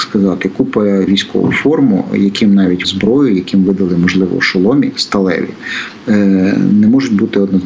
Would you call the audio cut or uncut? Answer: cut